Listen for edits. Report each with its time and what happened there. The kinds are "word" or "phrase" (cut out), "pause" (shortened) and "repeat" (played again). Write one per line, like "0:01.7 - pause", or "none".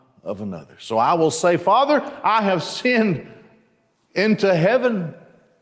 none